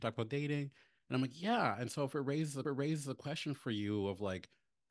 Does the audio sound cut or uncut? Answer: cut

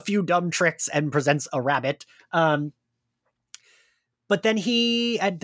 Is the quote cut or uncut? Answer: uncut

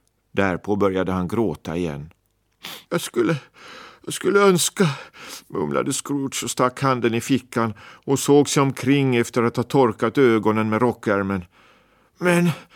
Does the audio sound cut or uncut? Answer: cut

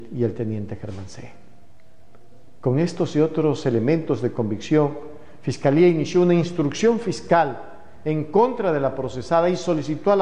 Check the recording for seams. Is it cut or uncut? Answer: uncut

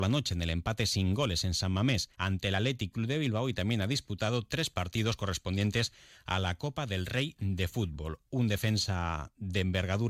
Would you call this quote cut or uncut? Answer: cut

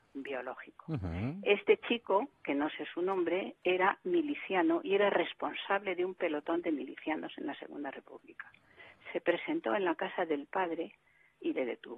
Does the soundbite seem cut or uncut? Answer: uncut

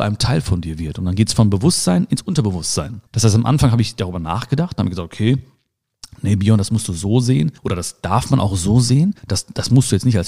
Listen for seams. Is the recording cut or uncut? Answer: cut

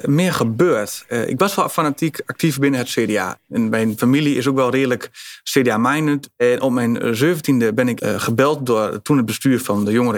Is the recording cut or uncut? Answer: cut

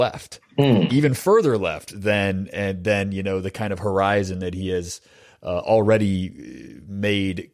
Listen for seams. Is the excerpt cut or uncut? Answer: uncut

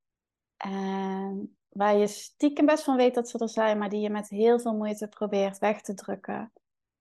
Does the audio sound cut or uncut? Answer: uncut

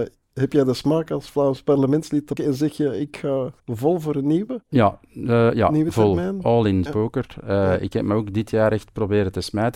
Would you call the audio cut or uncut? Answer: cut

